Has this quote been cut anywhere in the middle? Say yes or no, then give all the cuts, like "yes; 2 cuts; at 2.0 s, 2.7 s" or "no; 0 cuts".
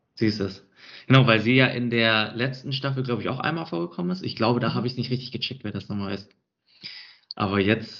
no; 0 cuts